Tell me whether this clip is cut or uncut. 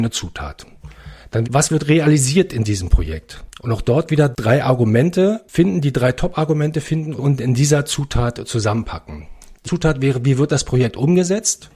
cut